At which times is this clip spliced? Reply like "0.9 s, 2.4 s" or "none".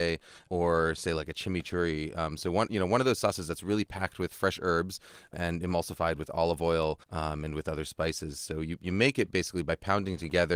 7.0 s